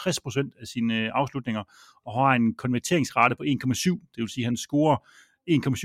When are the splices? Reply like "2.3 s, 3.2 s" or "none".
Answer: none